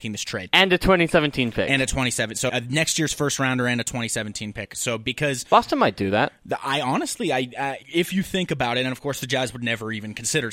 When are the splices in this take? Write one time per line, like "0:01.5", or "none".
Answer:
0:02.5
0:07.8